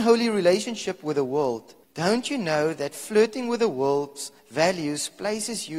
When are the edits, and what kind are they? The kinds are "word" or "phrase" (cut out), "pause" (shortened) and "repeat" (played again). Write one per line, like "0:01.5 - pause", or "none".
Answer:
0:01.8 - pause
0:04.4 - pause